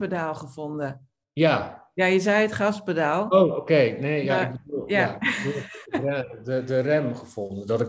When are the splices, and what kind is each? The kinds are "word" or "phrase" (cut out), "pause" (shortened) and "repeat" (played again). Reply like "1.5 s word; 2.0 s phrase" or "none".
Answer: none